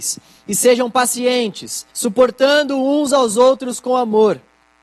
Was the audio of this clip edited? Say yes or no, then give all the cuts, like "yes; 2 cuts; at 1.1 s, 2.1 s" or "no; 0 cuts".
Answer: yes; 1 cut; at 1.9 s